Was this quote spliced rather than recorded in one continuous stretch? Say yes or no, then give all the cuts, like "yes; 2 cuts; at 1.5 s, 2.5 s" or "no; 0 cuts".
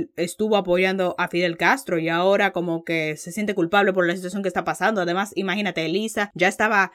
no; 0 cuts